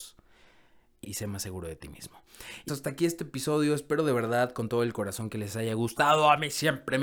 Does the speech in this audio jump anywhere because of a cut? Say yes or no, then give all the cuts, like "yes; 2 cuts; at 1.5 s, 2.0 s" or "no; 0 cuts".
yes; 2 cuts; at 1.0 s, 2.7 s